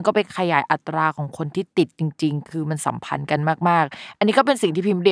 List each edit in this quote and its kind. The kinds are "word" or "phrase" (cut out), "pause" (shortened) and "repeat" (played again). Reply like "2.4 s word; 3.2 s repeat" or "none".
none